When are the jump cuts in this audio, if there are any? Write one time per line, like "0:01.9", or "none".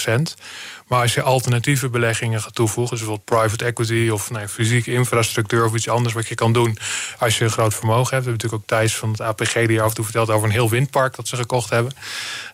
none